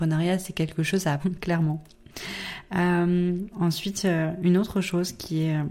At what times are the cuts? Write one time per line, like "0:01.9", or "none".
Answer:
0:01.2
0:03.5